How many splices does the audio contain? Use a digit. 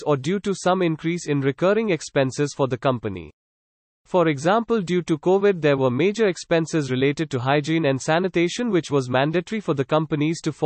0